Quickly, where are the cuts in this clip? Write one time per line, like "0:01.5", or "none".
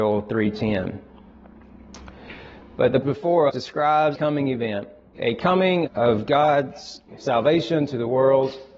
0:03.0
0:03.5
0:04.2
0:05.1
0:05.9
0:07.1